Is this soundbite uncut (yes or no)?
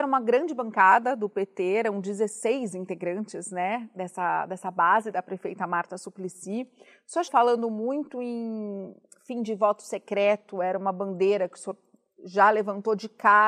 no